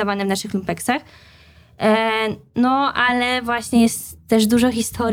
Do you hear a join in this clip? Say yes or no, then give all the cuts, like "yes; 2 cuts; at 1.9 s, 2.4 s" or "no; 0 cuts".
no; 0 cuts